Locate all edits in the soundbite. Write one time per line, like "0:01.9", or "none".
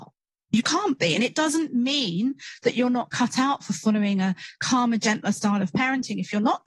none